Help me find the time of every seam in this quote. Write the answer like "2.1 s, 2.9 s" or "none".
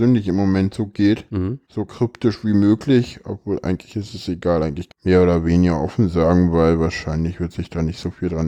1.6 s, 4.9 s